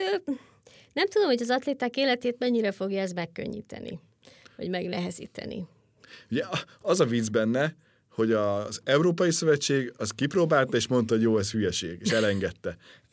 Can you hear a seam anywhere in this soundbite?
no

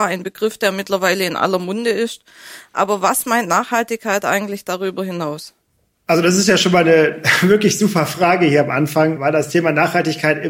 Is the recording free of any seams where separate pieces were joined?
yes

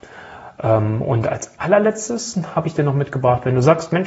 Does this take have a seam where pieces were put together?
no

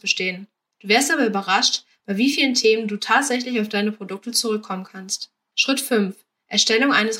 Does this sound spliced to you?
no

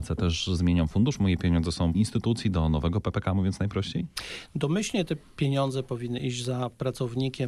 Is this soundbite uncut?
no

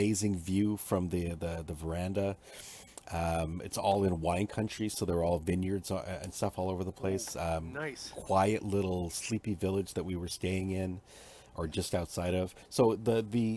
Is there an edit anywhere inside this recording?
no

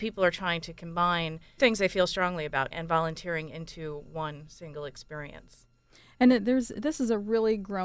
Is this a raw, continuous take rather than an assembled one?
no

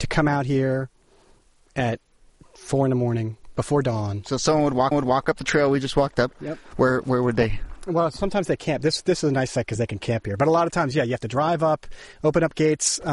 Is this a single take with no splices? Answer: no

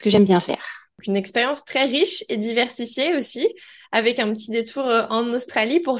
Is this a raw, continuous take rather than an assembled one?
yes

